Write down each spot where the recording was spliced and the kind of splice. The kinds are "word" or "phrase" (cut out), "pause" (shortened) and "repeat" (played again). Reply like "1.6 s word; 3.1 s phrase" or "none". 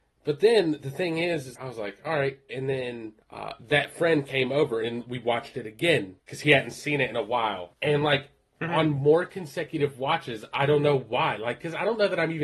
1.6 s word; 3.2 s pause; 6.2 s pause; 7.7 s pause